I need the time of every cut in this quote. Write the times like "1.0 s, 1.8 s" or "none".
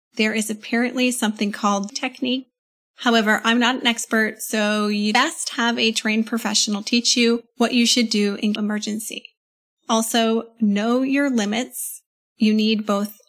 1.9 s, 7.5 s, 8.6 s